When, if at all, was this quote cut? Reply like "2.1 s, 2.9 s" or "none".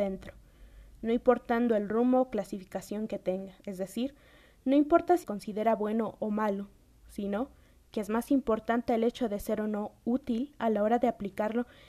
3.6 s, 5.2 s